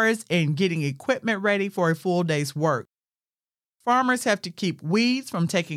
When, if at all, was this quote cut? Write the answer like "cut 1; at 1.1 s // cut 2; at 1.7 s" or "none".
none